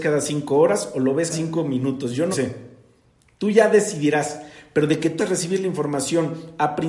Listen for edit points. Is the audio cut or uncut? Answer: cut